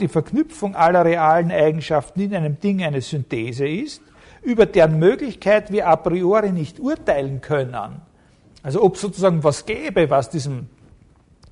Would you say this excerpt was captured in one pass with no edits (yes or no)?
yes